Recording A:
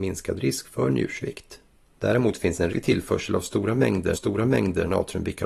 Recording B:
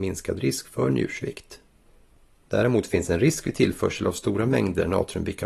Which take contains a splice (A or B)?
A